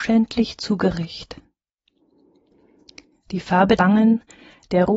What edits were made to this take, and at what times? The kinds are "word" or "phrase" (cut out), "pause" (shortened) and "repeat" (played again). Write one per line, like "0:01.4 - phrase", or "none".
0:03.8 - word